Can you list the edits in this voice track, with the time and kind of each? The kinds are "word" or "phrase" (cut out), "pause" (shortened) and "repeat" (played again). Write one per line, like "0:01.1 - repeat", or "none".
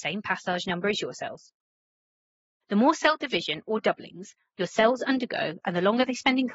none